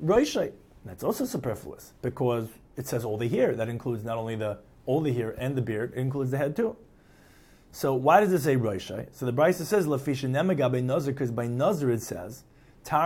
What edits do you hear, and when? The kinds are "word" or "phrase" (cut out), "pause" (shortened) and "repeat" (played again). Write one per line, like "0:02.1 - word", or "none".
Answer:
0:02.0 - pause